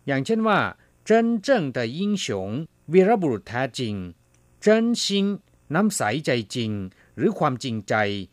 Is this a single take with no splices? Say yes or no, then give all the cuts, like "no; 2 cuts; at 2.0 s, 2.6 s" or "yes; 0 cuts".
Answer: yes; 0 cuts